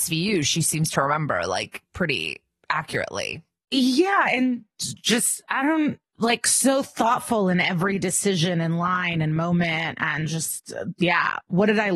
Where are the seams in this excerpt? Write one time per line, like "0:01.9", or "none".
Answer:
none